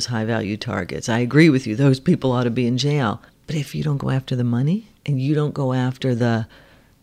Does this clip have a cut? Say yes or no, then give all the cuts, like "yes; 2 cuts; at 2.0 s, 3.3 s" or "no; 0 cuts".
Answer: yes; 2 cuts; at 3.3 s, 5.0 s